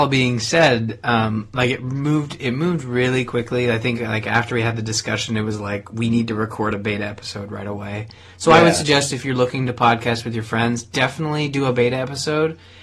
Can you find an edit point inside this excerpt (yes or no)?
no